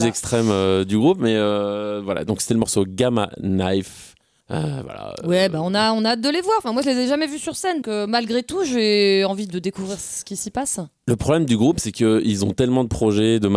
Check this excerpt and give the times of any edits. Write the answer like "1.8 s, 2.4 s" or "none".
7.8 s